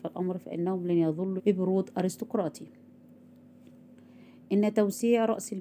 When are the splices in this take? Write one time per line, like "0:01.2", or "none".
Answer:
0:01.4